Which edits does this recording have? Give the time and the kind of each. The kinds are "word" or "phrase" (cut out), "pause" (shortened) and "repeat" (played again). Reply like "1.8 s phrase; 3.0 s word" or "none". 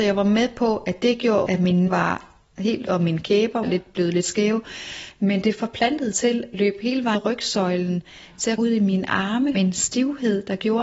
1.5 s word; 1.9 s word; 2.9 s word; 3.6 s word; 6.1 s word; 6.5 s word; 7.1 s word; 8.6 s word; 9.5 s word